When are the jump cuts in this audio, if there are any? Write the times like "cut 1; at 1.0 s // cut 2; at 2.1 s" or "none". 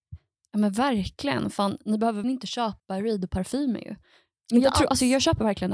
cut 1; at 2.2 s // cut 2; at 2.8 s